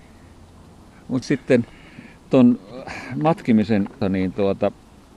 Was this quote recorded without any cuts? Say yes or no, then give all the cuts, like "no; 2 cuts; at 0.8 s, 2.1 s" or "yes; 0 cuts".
no; 2 cuts; at 1.2 s, 4.0 s